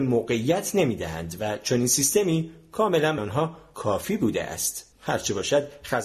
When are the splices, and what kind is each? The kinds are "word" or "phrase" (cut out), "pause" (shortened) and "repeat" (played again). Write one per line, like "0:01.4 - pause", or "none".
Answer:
0:03.2 - word
0:04.9 - pause